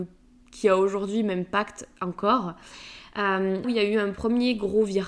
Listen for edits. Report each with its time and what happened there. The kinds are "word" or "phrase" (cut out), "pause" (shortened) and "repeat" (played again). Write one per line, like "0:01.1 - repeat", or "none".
0:03.6 - word